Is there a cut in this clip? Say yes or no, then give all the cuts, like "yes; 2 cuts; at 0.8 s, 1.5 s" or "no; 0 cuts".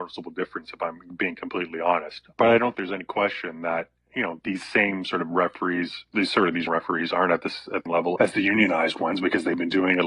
yes; 6 cuts; at 2.3 s, 2.7 s, 4.4 s, 6.7 s, 7.9 s, 8.2 s